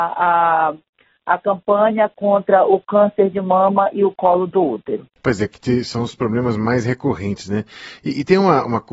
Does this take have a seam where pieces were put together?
yes; 1 cut; at 5.2 s

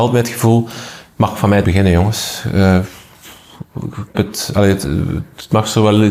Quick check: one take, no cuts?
no; 2 cuts; at 1.6 s, 4.1 s

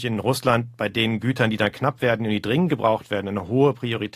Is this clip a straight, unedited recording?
yes; 0 cuts

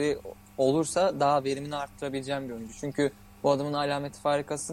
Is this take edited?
no; 0 cuts

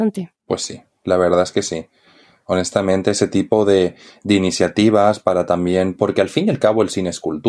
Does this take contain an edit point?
no; 0 cuts

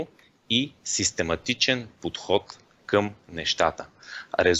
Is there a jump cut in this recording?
no; 0 cuts

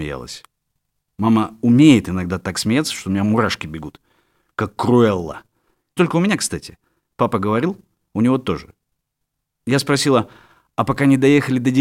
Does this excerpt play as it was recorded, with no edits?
no; 1 cut; at 6.0 s

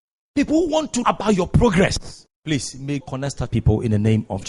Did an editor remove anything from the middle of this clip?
yes; 4 cuts; at 1.0 s, 2.3 s, 3.0 s, 3.5 s

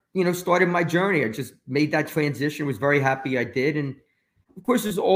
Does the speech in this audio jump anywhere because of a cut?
no; 0 cuts

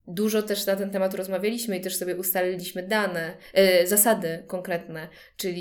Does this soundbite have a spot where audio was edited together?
no; 0 cuts

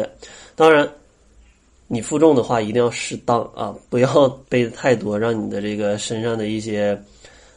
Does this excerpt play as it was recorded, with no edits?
no; 1 cut; at 4.4 s

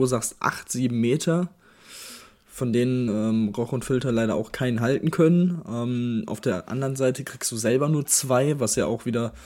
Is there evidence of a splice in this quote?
no; 0 cuts

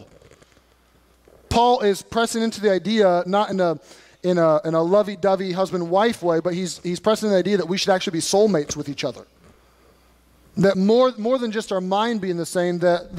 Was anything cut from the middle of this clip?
no; 0 cuts

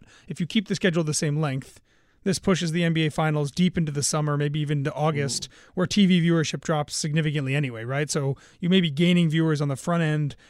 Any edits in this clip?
no; 0 cuts

